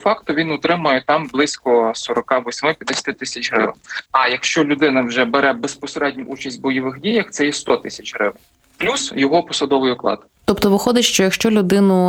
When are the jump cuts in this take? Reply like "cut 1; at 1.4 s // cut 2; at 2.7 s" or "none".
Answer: cut 1; at 4.1 s // cut 2; at 10.3 s